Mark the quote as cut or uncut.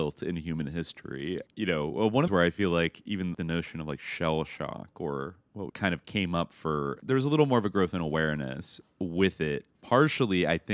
cut